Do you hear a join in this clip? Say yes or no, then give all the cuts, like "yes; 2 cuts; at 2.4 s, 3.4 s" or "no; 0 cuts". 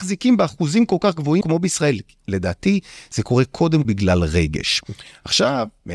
yes; 2 cuts; at 1.4 s, 3.8 s